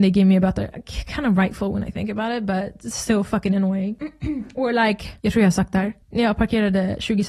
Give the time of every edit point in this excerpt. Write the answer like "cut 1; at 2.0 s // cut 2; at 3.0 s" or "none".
cut 1; at 5.2 s // cut 2; at 6.0 s